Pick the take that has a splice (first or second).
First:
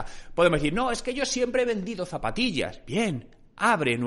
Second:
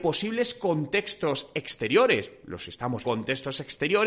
second